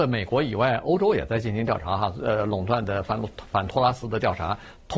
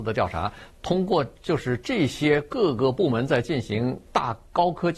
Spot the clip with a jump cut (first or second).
second